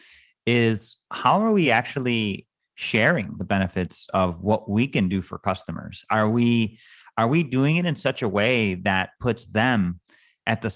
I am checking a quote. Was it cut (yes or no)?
no